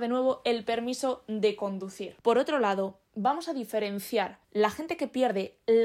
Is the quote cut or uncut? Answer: cut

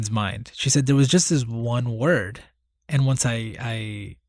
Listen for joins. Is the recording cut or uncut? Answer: uncut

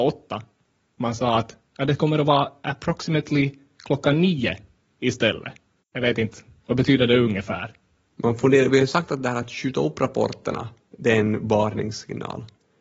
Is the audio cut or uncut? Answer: uncut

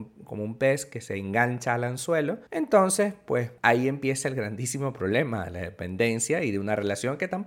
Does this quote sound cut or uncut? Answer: cut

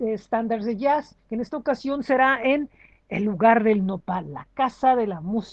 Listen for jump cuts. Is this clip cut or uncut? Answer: cut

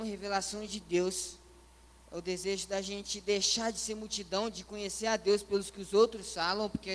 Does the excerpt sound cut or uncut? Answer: uncut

